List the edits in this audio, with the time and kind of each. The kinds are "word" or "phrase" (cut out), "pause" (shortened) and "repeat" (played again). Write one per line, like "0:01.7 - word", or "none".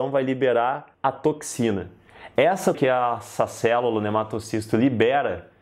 0:00.9 - pause
0:02.7 - word